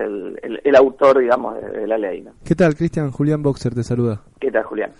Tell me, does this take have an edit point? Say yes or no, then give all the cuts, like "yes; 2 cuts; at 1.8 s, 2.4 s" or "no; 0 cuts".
yes; 1 cut; at 2.4 s